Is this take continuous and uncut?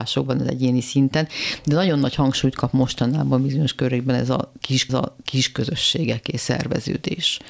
no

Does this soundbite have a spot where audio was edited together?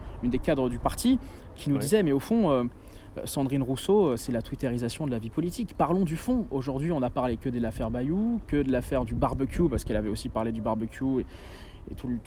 no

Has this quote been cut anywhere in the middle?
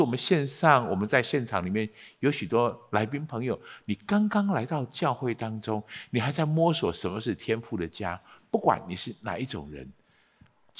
no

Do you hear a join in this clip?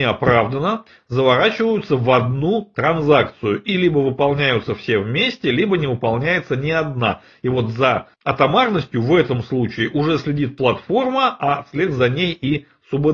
yes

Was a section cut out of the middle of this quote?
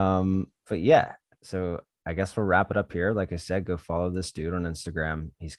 no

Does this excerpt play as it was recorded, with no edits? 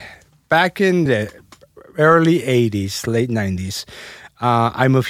yes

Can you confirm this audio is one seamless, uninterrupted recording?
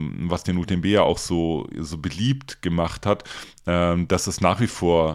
yes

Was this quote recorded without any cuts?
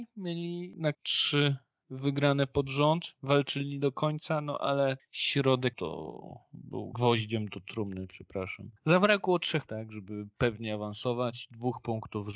no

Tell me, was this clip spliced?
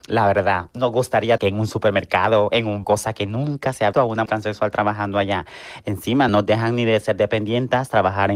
yes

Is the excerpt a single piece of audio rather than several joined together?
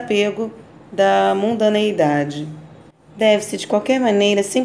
no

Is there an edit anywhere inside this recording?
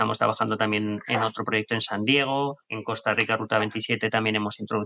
yes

